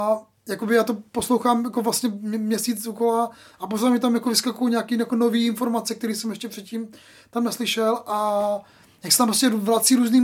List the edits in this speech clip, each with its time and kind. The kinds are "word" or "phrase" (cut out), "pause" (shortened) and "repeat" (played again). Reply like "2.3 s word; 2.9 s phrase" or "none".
none